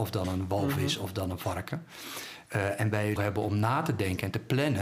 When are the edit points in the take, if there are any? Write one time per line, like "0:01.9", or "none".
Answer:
0:03.2